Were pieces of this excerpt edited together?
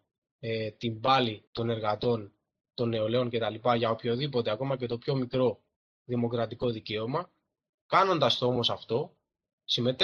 yes; 1 cut; at 1.5 s

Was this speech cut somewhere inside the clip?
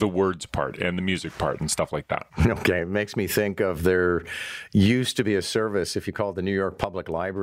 no; 0 cuts

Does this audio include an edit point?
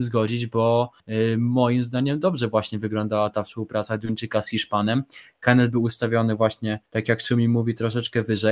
yes; 2 cuts; at 1.0 s, 6.9 s

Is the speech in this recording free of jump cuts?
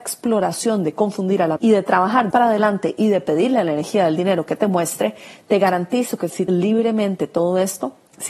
no; 3 cuts; at 1.6 s, 2.3 s, 6.5 s

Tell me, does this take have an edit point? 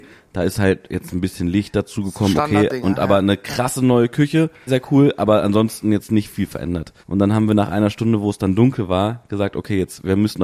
yes; 2 cuts; at 4.7 s, 7.0 s

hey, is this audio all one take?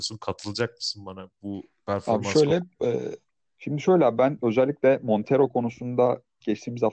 yes; 0 cuts

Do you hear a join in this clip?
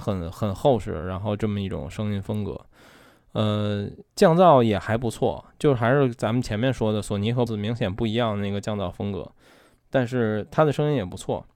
yes; 2 cuts; at 4.1 s, 7.5 s

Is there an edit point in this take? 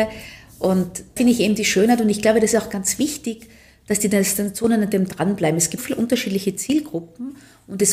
yes; 2 cuts; at 1.2 s, 5.8 s

